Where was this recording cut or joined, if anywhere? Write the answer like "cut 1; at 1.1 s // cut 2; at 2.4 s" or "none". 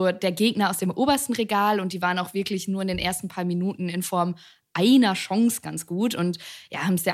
none